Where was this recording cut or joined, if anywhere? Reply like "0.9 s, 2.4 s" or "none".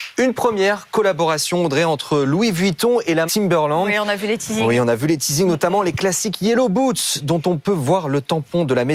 3.3 s